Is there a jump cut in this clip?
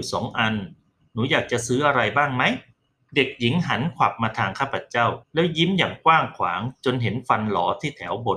yes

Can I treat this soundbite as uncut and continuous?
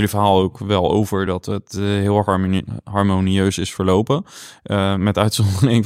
yes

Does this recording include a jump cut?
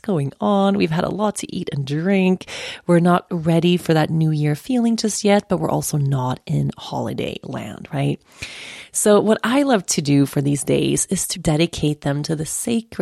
yes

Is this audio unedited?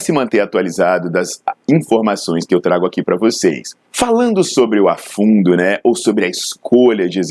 no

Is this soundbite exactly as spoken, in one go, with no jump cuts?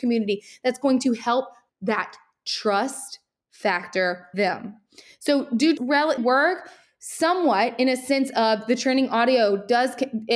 no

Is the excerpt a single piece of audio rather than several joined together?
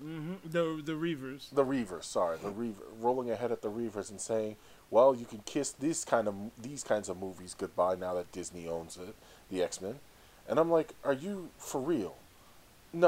yes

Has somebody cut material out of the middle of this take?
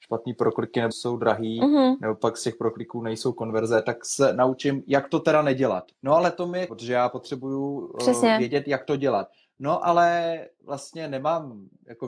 yes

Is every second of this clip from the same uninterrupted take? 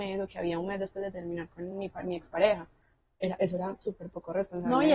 yes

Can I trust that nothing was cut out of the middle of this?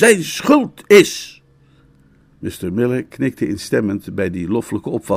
yes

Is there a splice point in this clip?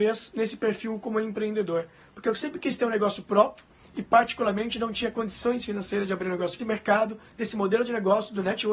yes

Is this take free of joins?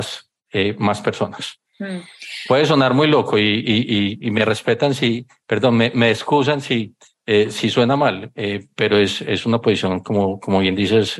no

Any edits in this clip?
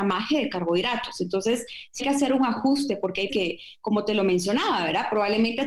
yes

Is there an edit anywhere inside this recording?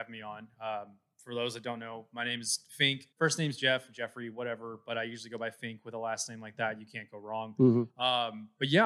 yes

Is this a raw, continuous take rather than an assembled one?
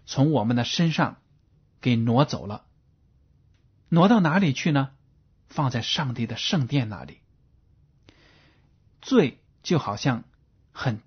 no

